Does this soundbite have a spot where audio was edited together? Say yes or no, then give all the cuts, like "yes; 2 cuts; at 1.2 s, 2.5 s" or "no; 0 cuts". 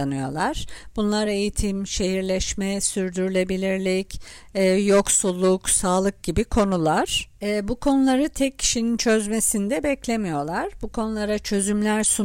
no; 0 cuts